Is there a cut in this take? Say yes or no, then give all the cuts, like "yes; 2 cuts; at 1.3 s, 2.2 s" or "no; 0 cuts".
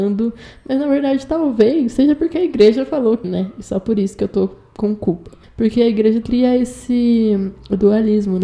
yes; 3 cuts; at 3.2 s, 5.4 s, 6.2 s